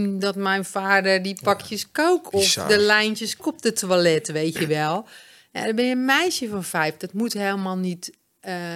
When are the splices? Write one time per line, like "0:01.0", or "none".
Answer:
0:03.4